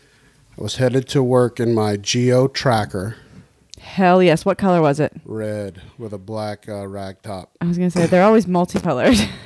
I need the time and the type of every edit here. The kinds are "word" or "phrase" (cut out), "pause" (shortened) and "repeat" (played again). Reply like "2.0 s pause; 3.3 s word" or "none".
none